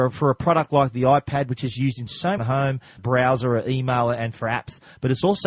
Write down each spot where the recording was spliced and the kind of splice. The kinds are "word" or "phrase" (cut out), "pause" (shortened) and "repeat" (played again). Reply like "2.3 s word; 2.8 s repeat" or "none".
2.4 s phrase; 3.0 s phrase